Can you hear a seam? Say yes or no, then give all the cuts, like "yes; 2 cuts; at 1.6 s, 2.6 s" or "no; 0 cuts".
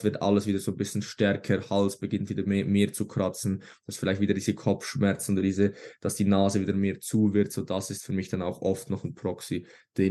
no; 0 cuts